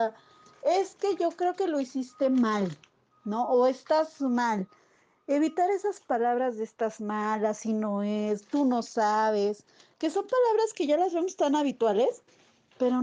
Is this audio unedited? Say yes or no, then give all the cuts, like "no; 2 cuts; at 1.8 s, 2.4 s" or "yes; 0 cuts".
yes; 0 cuts